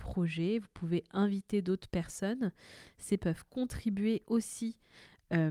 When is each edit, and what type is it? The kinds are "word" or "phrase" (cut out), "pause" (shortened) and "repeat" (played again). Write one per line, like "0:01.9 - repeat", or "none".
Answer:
0:03.2 - word

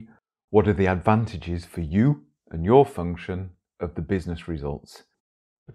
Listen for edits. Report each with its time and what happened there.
none

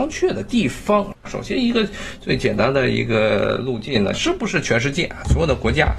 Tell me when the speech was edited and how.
0:01.2 - pause
0:04.1 - phrase

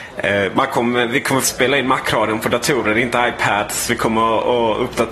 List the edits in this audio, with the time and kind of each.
0:01.4 - word

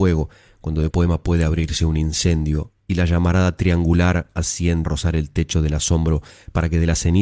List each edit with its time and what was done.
0:00.9 - word
0:02.8 - pause
0:04.8 - word

